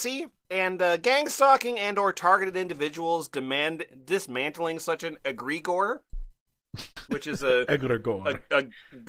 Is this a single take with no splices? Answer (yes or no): yes